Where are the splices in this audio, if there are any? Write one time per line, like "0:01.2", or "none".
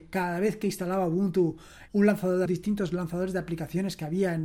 0:01.9
0:02.5